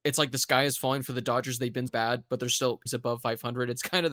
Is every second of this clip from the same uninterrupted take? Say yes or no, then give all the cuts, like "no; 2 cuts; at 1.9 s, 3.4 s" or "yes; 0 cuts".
no; 2 cuts; at 1.9 s, 2.9 s